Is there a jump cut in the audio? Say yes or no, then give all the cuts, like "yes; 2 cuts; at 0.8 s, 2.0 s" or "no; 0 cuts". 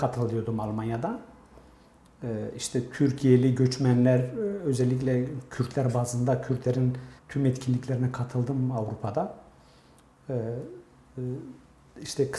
yes; 1 cut; at 7.2 s